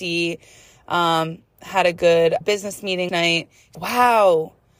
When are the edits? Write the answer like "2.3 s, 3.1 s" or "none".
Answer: 2.4 s, 3.1 s, 3.7 s